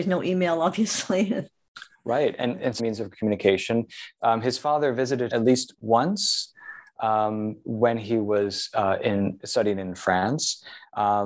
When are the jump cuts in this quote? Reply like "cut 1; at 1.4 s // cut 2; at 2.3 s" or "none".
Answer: cut 1; at 2.8 s // cut 2; at 5.3 s